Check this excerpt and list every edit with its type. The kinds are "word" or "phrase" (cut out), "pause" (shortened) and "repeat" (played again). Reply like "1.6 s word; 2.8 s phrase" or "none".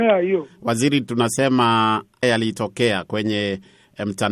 2.2 s word